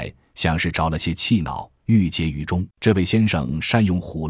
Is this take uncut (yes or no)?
no